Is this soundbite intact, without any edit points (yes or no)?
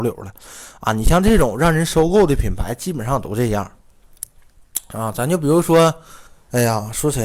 no